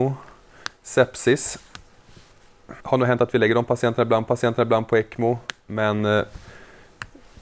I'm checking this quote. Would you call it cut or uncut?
cut